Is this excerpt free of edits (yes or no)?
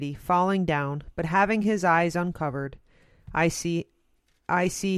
yes